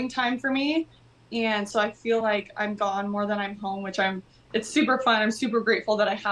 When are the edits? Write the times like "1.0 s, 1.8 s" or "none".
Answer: none